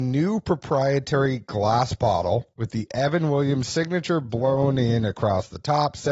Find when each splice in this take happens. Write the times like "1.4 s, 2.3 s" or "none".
none

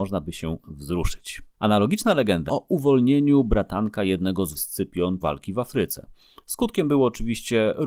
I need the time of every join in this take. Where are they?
1.5 s, 2.5 s, 4.5 s, 5.2 s

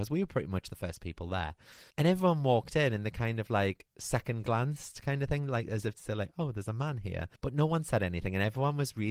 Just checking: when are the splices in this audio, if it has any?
1.9 s, 3.9 s, 7.4 s

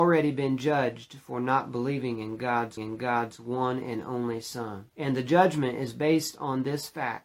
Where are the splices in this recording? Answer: 2.8 s, 4.9 s

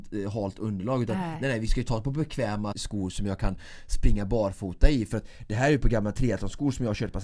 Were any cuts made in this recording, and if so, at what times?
2.7 s

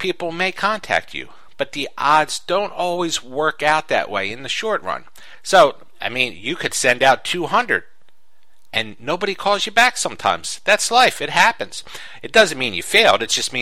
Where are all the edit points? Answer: none

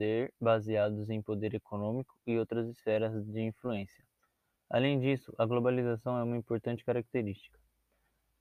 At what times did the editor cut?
none

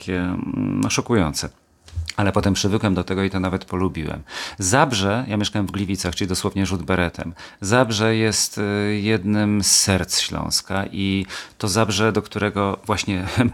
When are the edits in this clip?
none

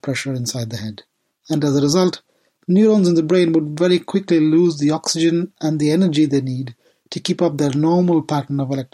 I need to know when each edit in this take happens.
none

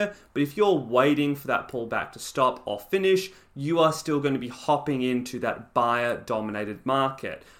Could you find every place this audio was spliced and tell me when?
none

